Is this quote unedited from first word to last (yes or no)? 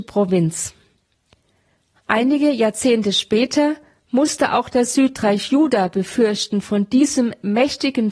yes